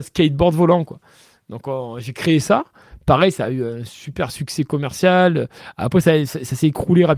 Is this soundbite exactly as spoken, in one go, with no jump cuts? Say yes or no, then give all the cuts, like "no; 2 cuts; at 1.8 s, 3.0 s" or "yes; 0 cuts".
yes; 0 cuts